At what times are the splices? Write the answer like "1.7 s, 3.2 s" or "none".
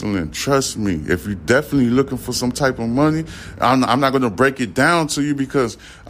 none

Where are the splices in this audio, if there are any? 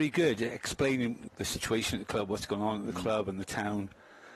1.3 s

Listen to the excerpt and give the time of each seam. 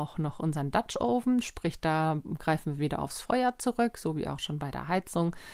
none

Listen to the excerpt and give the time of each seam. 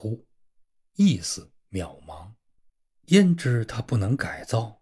2.7 s

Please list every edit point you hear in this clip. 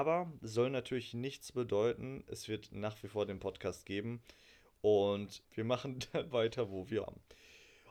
5.4 s, 6.3 s, 7.0 s

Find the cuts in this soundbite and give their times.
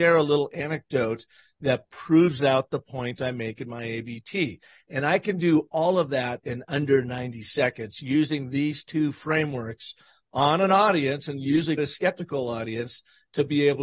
11.8 s

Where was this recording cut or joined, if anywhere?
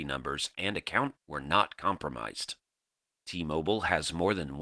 1.2 s

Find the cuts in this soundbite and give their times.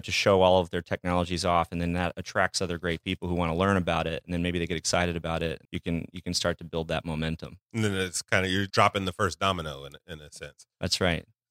5.6 s, 8.7 s

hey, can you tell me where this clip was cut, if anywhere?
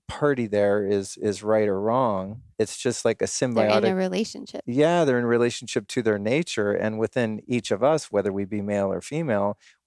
2.5 s

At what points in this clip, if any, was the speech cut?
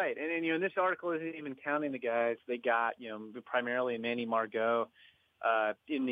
none

